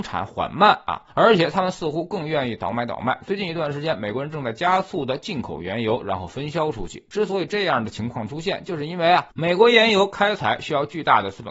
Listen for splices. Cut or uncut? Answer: cut